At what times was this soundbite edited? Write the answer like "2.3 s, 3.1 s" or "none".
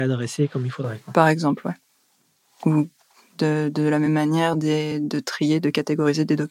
none

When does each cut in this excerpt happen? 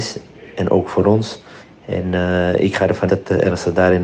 1.6 s, 3.1 s

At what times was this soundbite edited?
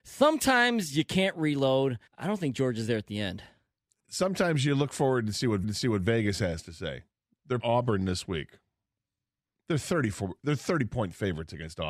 2.1 s, 5.6 s, 7.6 s

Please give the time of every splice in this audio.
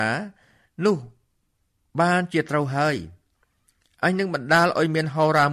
none

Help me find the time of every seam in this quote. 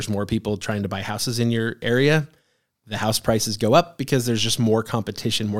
none

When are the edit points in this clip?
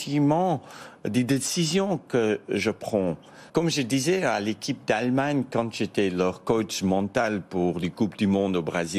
3.5 s

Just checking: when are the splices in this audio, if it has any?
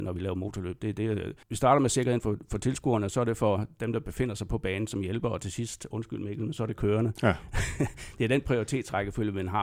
1.4 s

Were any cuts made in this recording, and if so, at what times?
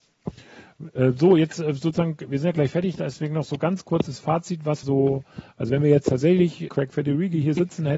4.8 s, 6.7 s

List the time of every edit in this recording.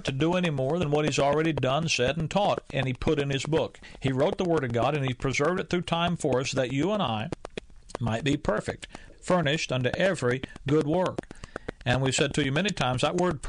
9.1 s

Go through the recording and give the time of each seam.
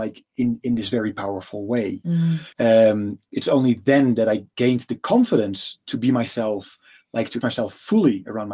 2.5 s, 7.4 s

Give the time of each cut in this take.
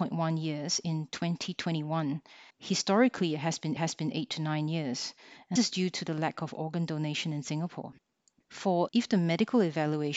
2.5 s, 3.8 s, 5.6 s, 8.9 s

